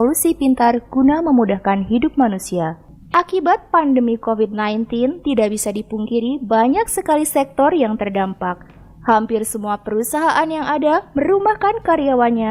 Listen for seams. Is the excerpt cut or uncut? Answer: uncut